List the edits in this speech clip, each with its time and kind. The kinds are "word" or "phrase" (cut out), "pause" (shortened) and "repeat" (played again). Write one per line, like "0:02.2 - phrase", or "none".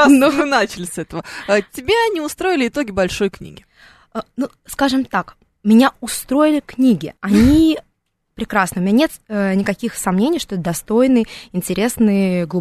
0:07.2 - pause